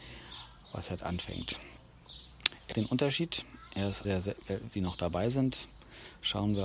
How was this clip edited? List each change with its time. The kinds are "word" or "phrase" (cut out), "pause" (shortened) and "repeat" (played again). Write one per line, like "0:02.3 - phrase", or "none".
0:01.0 - word
0:02.7 - word
0:04.0 - word
0:04.7 - word